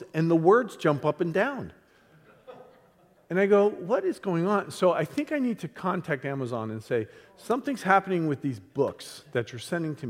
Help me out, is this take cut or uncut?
uncut